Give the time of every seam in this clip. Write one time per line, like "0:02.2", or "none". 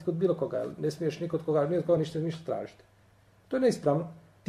none